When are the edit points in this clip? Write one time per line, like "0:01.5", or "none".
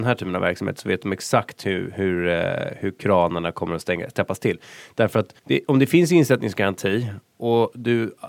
0:05.4